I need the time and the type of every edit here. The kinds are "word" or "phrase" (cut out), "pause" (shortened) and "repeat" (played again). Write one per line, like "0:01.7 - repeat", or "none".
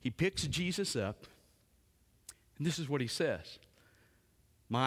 none